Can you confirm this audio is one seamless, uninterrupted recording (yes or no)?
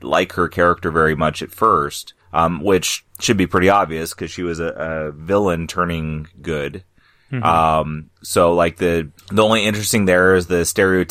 no